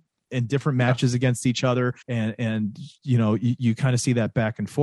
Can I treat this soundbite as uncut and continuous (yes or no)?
no